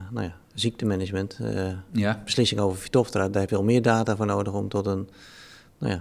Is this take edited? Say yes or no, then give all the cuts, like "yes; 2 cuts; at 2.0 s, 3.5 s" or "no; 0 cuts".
yes; 1 cut; at 3.5 s